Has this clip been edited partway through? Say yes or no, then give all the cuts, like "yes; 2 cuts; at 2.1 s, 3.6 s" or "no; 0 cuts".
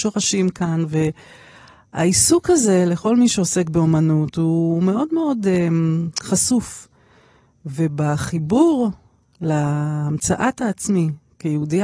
no; 0 cuts